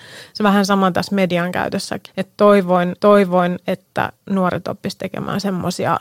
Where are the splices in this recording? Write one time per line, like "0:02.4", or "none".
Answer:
0:02.1
0:03.0